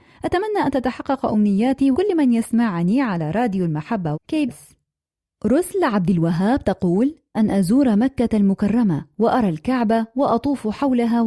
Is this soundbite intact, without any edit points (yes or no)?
no